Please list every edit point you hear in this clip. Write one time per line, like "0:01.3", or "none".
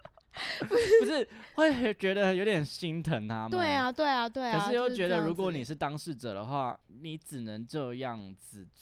0:06.8

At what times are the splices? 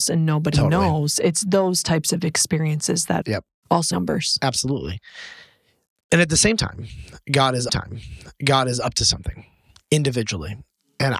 0:03.2
0:03.9
0:07.7

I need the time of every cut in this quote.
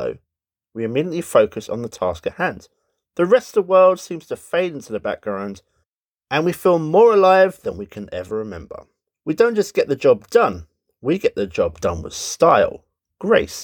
none

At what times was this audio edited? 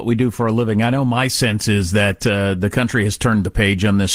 none

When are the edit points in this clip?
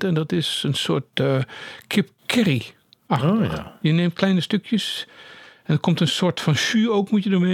none

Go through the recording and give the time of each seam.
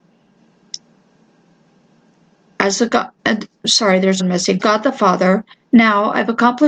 0:03.2
0:04.2
0:04.6

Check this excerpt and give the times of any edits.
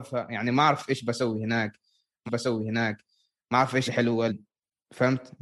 0:02.3
0:03.9
0:04.3

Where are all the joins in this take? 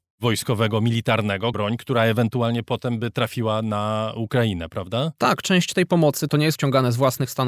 0:01.5
0:06.6

